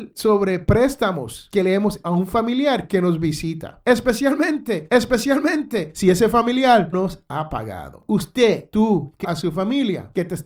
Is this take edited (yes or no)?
yes